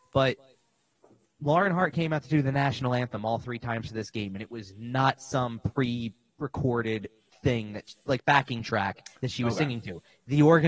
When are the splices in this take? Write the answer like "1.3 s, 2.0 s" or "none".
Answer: none